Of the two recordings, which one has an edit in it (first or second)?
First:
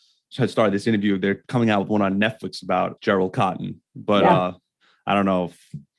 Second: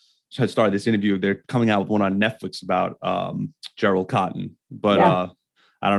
first